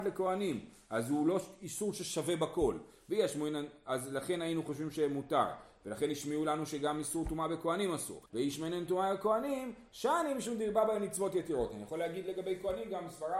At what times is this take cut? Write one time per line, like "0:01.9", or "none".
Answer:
0:08.3

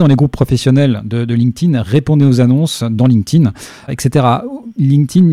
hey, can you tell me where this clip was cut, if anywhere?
0:03.9

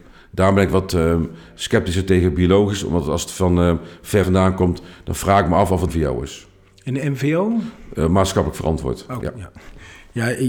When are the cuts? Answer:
0:04.2
0:05.9
0:09.2

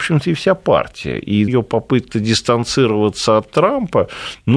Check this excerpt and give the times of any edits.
0:01.5
0:02.1

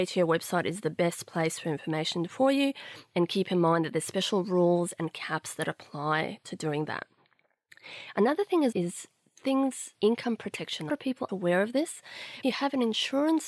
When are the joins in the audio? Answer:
0:08.7
0:09.9
0:10.9
0:11.3
0:12.4

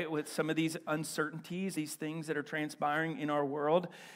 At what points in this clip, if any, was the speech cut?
0:01.7

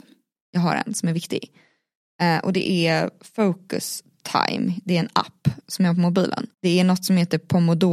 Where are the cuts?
0:04.1
0:06.5

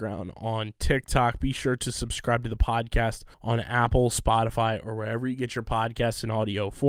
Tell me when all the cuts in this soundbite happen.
0:03.3

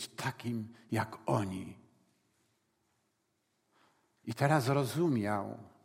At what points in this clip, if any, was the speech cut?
none

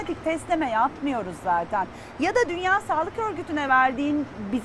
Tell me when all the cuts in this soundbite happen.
none

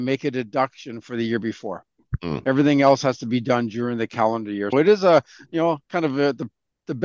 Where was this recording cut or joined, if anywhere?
0:04.7

